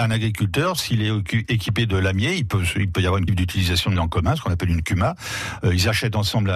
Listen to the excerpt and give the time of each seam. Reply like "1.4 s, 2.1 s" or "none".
3.3 s, 4.0 s